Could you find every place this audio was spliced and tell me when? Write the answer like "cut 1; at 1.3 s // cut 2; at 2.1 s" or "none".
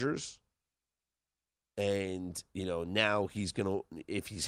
none